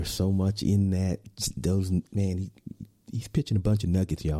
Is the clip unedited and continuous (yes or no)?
yes